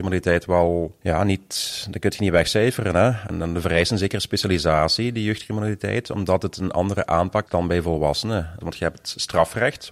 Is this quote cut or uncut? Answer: cut